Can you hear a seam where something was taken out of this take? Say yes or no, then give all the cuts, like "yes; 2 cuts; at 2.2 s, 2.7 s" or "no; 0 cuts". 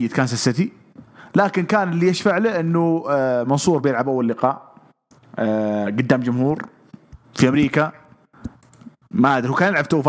no; 0 cuts